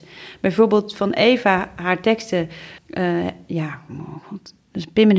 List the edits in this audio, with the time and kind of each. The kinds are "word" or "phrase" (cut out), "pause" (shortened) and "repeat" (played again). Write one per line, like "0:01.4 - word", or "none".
0:02.8 - pause